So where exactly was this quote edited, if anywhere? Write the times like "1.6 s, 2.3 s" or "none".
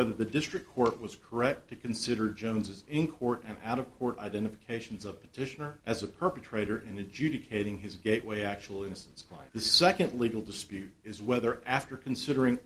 5.8 s, 9.5 s